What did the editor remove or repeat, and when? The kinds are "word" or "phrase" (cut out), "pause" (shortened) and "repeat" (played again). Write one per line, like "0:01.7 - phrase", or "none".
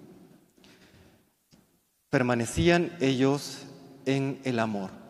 none